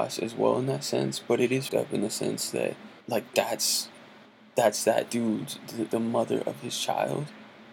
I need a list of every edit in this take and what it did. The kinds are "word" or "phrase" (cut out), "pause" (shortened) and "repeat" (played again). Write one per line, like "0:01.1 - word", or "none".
0:01.7 - word
0:03.0 - pause
0:04.3 - pause
0:05.9 - word